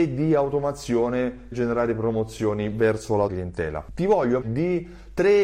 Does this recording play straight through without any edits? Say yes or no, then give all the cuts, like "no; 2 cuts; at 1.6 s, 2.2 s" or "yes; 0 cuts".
no; 3 cuts; at 1.5 s, 3.3 s, 4.4 s